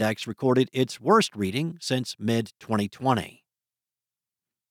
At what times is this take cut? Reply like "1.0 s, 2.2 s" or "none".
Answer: none

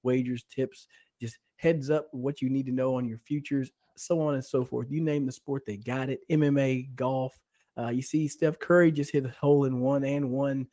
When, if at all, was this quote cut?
none

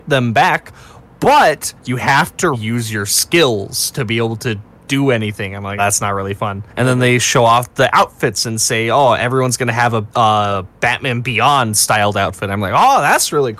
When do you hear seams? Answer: 1.8 s, 2.5 s, 5.8 s, 6.7 s, 10.1 s

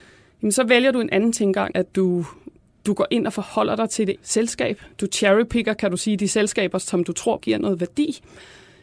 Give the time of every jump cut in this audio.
1.7 s, 4.2 s, 7.4 s

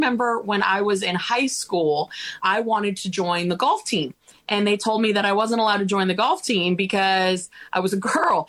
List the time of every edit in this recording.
2.4 s

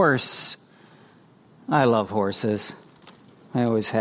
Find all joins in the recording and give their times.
none

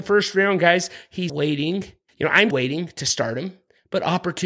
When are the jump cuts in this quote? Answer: 1.3 s, 2.1 s, 2.5 s

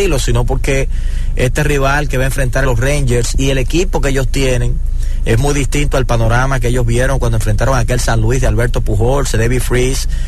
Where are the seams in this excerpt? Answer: 2.6 s

